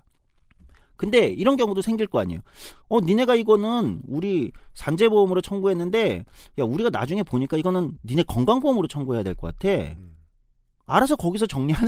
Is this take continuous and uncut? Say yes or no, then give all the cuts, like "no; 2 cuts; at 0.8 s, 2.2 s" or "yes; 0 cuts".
yes; 0 cuts